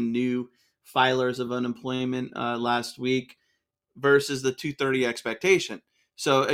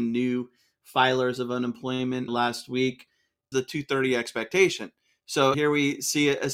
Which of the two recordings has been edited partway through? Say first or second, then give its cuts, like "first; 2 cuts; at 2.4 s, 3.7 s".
second; 3 cuts; at 2.3 s, 3.5 s, 5.5 s